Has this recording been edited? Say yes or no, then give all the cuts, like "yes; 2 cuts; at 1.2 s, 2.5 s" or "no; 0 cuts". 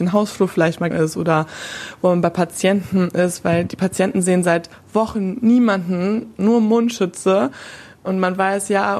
yes; 1 cut; at 0.9 s